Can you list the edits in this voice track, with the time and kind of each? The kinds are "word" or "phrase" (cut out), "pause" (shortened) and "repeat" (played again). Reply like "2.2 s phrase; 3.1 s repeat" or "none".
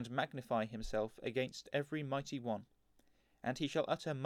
none